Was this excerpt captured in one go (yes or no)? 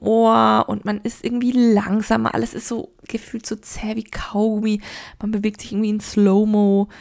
yes